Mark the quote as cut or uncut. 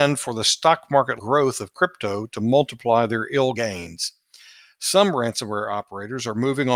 cut